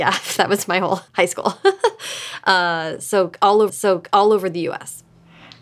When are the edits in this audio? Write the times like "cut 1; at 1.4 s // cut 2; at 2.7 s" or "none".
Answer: cut 1; at 1.1 s // cut 2; at 3.7 s